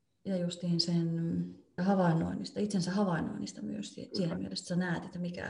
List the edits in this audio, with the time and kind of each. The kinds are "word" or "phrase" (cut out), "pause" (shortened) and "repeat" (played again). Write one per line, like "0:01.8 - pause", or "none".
0:01.8 - phrase